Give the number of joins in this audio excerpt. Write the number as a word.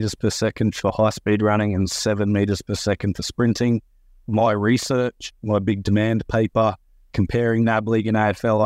zero